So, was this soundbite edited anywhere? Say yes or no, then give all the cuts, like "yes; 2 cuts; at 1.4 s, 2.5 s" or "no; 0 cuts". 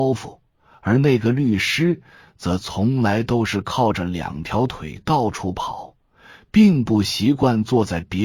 no; 0 cuts